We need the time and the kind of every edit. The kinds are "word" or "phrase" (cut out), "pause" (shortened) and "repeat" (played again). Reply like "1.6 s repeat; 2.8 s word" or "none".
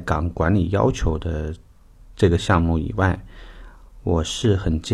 1.9 s pause

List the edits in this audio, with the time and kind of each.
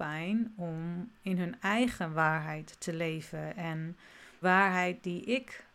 4.4 s word

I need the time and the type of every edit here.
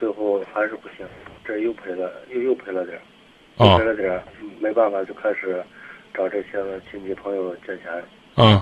1.4 s word

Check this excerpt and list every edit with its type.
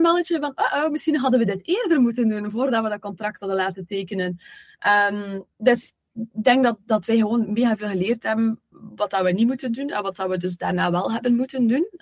none

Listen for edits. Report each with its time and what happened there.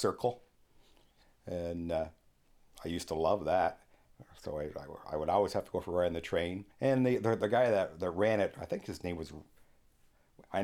6.7 s pause

